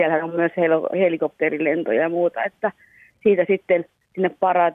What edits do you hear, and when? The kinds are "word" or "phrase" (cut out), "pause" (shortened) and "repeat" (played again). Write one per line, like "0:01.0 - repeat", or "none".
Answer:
none